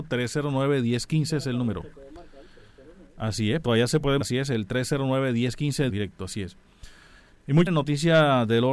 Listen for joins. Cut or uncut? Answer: cut